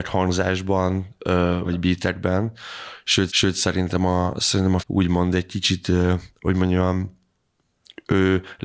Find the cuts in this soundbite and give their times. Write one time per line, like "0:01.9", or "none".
0:01.6
0:03.3
0:04.8
0:06.3